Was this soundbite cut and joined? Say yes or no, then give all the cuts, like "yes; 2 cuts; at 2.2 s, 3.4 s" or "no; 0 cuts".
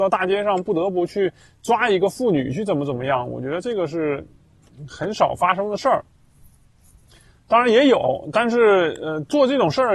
no; 0 cuts